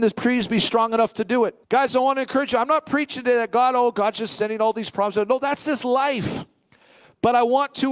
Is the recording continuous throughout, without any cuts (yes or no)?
no